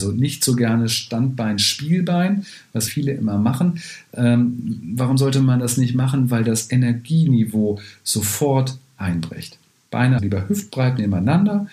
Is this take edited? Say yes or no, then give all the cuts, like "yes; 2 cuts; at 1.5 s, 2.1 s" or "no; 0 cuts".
yes; 2 cuts; at 2.9 s, 10.2 s